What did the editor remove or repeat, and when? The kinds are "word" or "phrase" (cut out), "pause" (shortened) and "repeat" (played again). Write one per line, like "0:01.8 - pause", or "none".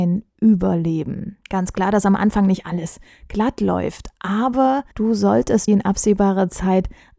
0:01.4 - pause
0:04.9 - pause
0:05.7 - phrase